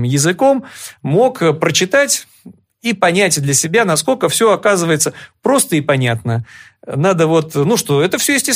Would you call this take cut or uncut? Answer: uncut